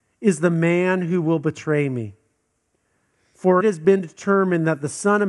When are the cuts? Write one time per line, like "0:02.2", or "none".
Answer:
0:03.6